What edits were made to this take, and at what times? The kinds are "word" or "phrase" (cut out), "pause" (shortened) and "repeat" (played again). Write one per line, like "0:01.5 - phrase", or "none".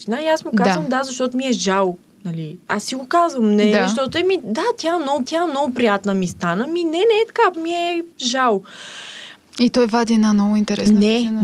0:05.2 - repeat
0:07.5 - word
0:08.1 - pause